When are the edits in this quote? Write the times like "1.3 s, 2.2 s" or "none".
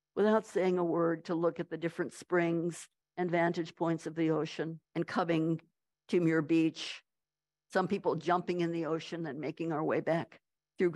1.2 s, 4.8 s